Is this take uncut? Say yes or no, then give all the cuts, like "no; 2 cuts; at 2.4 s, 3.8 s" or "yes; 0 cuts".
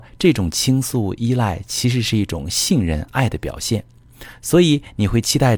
yes; 0 cuts